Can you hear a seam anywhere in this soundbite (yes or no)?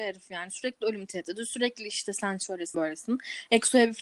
yes